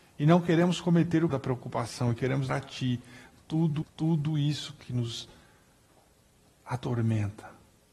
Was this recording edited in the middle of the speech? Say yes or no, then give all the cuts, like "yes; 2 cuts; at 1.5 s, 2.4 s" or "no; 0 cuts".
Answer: yes; 3 cuts; at 1.3 s, 2.5 s, 3.8 s